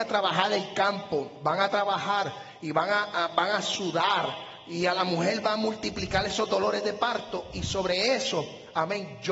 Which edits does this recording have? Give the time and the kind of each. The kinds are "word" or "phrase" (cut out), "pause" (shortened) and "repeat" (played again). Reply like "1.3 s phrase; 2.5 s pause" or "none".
none